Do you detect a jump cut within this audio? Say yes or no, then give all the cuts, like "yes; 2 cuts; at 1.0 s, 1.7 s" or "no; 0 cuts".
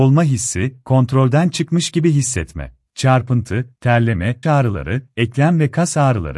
yes; 2 cuts; at 2.9 s, 4.4 s